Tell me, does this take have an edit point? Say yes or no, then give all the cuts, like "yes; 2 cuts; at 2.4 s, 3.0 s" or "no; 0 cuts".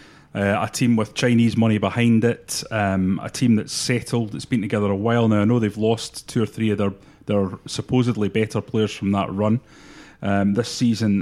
no; 0 cuts